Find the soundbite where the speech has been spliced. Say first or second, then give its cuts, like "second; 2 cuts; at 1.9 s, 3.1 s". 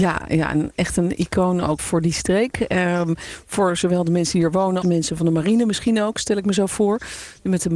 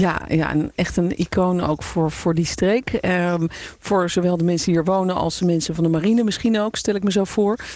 first; 2 cuts; at 1.8 s, 4.8 s